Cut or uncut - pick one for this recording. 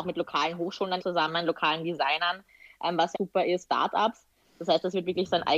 cut